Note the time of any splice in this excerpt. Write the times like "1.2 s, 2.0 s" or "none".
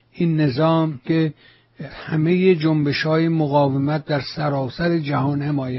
1.0 s, 1.9 s